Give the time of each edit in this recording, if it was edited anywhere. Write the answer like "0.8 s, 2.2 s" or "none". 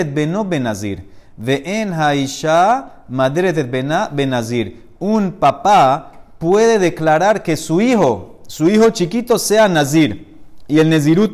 none